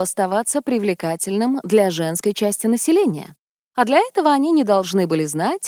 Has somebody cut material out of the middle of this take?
no; 0 cuts

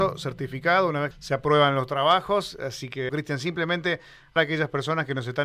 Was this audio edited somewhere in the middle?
yes; 3 cuts; at 1.1 s, 3.1 s, 4.4 s

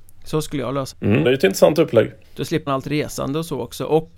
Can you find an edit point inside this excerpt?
yes; 4 cuts; at 0.9 s, 1.2 s, 2.2 s, 2.7 s

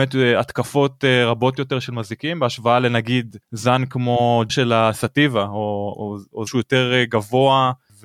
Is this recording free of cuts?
no; 4 cuts; at 3.4 s, 4.5 s, 5.9 s, 6.5 s

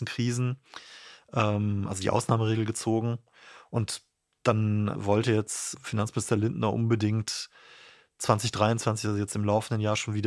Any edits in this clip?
no; 0 cuts

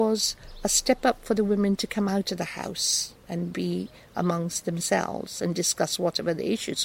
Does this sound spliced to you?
no; 0 cuts

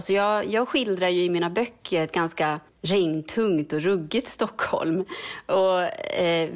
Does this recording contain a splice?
yes; 1 cut; at 2.7 s

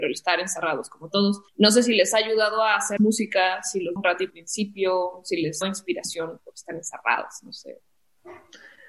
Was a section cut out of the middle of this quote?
yes; 5 cuts; at 1.5 s, 3.0 s, 4.0 s, 4.3 s, 5.6 s

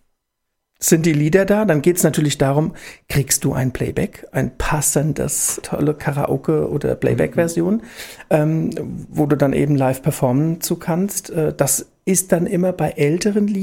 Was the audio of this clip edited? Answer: yes; 1 cut; at 5.6 s

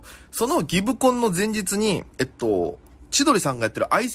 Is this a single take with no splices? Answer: no; 1 cut; at 2.1 s

